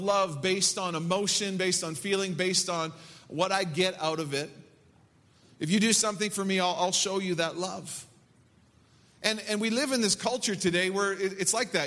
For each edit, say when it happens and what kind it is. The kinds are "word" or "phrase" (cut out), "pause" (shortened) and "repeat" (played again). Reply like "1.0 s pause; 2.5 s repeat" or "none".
none